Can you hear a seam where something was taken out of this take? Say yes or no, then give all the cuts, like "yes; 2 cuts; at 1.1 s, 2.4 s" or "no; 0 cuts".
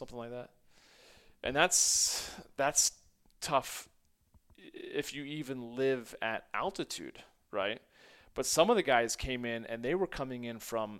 no; 0 cuts